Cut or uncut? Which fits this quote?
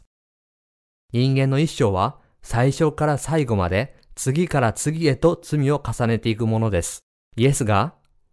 cut